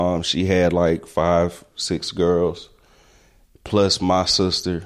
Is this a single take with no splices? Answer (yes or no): yes